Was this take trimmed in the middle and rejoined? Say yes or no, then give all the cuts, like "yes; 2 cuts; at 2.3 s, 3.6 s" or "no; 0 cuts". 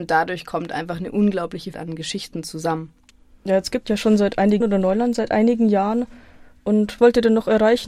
yes; 4 cuts; at 1.7 s, 3.9 s, 4.6 s, 7.0 s